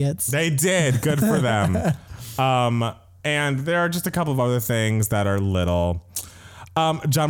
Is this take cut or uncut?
uncut